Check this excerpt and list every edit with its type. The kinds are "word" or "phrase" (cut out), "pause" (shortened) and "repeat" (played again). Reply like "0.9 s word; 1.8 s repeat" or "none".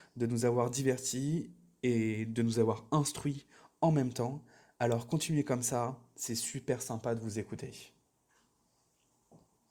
none